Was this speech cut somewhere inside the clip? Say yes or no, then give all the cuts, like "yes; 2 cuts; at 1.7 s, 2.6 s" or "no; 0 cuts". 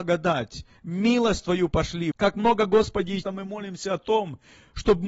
yes; 2 cuts; at 2.1 s, 3.2 s